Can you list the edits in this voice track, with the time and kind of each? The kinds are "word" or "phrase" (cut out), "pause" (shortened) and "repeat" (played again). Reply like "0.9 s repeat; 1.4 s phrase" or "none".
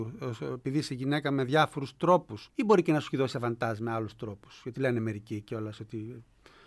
2.5 s pause